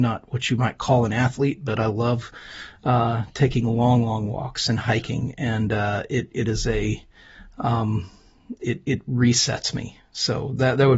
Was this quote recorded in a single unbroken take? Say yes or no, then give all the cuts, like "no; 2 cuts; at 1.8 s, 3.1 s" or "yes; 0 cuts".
yes; 0 cuts